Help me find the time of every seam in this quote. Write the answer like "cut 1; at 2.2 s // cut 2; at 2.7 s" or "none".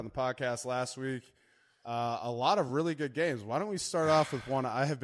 none